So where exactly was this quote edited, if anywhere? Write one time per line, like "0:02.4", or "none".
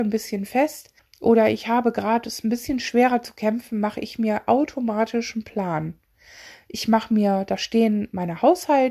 0:01.0